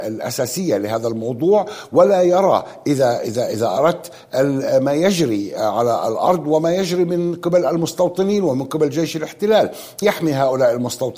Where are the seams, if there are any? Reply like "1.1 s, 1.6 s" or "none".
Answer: 10.0 s